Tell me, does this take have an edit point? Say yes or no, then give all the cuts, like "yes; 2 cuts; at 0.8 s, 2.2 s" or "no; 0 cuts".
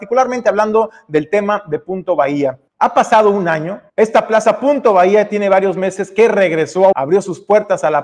yes; 3 cuts; at 2.7 s, 3.9 s, 6.9 s